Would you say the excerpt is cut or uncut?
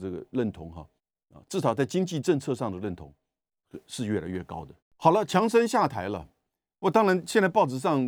cut